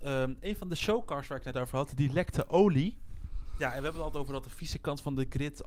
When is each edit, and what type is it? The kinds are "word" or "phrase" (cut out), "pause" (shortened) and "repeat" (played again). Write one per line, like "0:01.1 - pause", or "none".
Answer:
none